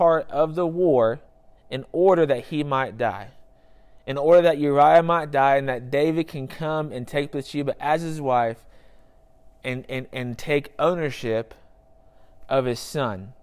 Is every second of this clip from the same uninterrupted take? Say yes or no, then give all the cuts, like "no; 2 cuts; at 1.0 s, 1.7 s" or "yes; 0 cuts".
no; 1 cut; at 1.3 s